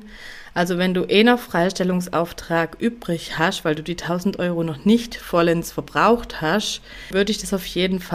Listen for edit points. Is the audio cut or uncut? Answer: uncut